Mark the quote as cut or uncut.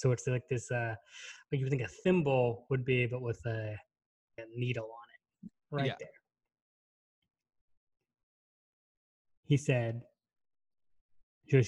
cut